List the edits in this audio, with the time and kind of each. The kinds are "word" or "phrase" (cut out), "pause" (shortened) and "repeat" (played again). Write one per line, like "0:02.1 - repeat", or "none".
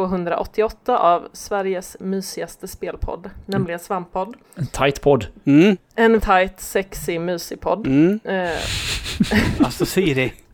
0:04.4 - pause
0:06.2 - word